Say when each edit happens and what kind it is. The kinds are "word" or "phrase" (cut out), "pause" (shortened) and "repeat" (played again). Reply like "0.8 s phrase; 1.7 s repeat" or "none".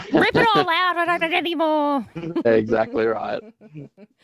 1.2 s word; 2.4 s word